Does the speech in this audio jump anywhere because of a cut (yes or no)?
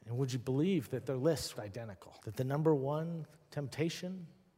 yes